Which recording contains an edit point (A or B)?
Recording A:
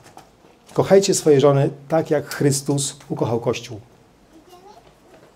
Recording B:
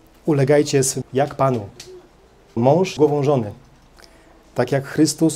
B